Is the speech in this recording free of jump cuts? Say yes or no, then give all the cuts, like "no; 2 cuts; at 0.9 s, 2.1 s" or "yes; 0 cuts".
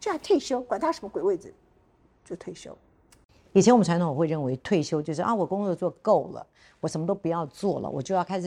yes; 0 cuts